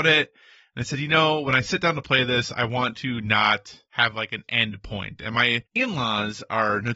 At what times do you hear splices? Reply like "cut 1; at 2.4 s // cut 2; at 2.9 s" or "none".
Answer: cut 1; at 5.7 s